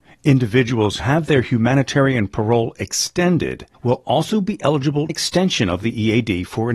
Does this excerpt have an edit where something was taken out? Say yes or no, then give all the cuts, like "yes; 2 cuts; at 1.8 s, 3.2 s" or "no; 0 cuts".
yes; 3 cuts; at 1.0 s, 3.7 s, 5.1 s